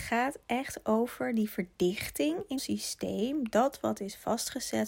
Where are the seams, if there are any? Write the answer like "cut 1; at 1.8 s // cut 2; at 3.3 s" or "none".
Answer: cut 1; at 2.6 s

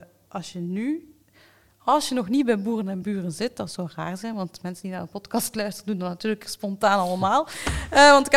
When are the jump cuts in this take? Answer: none

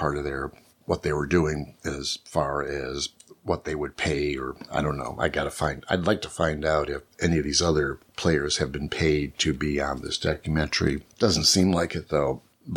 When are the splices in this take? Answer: cut 1; at 7.1 s // cut 2; at 8.1 s // cut 3; at 11.1 s

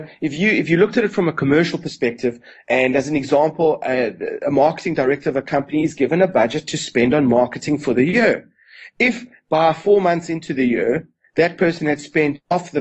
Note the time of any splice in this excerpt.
none

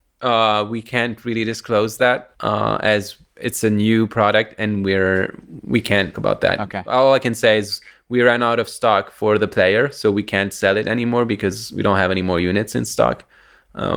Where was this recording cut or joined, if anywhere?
cut 1; at 2.3 s // cut 2; at 6.1 s

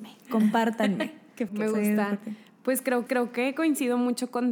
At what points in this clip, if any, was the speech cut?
cut 1; at 1.5 s // cut 2; at 3.1 s

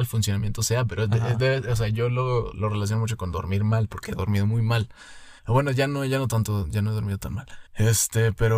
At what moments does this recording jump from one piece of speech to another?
cut 1; at 5.4 s // cut 2; at 7.7 s

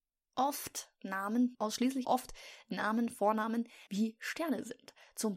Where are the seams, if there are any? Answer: cut 1; at 1.5 s // cut 2; at 2.0 s // cut 3; at 3.9 s

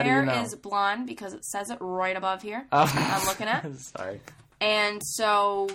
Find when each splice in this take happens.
none

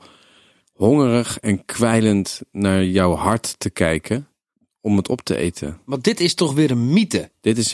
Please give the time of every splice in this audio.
none

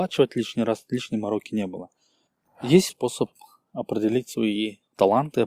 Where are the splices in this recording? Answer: cut 1; at 2.9 s

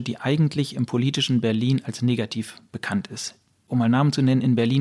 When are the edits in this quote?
none

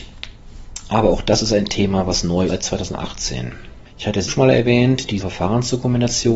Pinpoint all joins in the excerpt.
cut 1; at 2.5 s // cut 2; at 3.9 s // cut 3; at 4.3 s // cut 4; at 5.2 s

